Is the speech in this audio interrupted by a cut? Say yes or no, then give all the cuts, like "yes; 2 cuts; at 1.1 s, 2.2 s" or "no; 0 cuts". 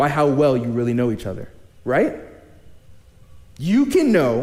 yes; 1 cut; at 1.7 s